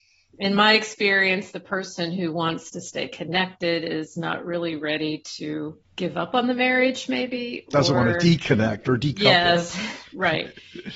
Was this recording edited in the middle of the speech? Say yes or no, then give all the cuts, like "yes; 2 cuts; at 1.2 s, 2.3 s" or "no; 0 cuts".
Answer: yes; 1 cut; at 5.8 s